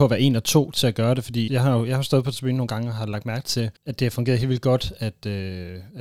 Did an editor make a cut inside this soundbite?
yes; 2 cuts; at 1.5 s, 3.8 s

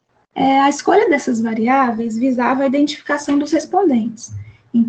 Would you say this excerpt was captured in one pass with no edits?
yes; 0 cuts

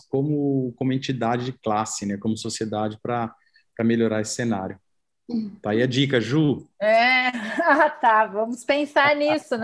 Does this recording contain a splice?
no; 0 cuts

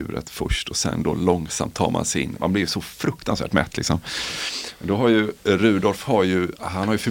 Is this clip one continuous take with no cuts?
yes; 0 cuts

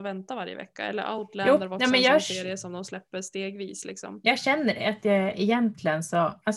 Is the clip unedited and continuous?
yes; 0 cuts

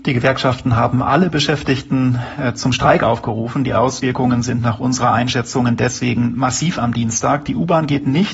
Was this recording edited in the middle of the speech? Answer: no; 0 cuts

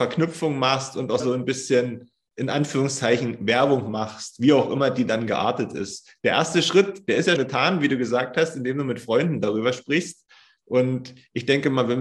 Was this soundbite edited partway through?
yes; 2 cuts; at 1.2 s, 7.4 s

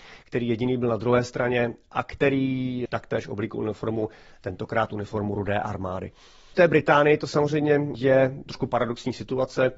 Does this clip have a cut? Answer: no; 0 cuts

